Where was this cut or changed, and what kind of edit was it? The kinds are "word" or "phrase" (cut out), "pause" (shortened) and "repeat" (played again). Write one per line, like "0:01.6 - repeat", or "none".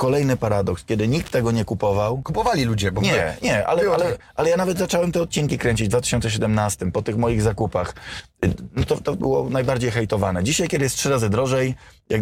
0:09.2 - phrase